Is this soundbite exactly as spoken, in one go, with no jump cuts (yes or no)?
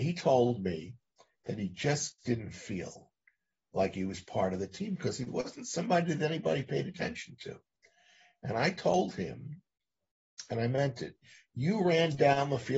yes